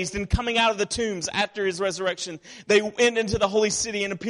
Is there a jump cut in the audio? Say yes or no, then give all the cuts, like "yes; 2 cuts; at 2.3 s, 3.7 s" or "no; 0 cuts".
no; 0 cuts